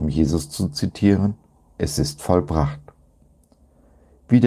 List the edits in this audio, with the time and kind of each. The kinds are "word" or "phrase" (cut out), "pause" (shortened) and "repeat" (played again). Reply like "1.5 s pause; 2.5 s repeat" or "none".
none